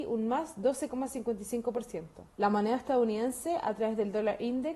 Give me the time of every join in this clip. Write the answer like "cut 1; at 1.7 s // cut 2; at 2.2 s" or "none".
cut 1; at 2.3 s